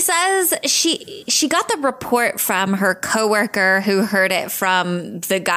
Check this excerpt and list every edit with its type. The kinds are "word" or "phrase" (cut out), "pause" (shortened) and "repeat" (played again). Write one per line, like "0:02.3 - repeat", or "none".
none